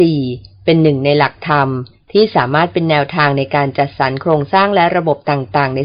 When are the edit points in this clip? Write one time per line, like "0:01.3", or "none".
none